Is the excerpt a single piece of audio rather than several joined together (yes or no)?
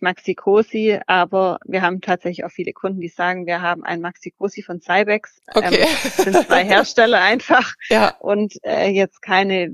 yes